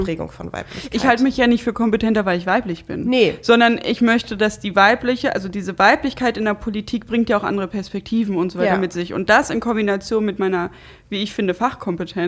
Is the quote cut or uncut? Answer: uncut